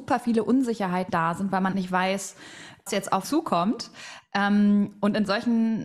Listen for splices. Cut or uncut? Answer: cut